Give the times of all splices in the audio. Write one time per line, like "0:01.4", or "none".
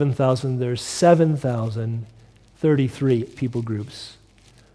0:03.4